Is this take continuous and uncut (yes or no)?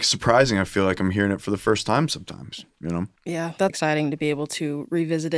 no